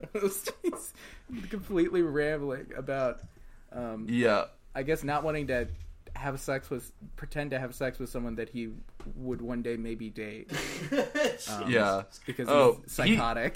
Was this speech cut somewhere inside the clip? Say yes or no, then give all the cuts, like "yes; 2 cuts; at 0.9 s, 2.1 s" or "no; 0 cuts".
no; 0 cuts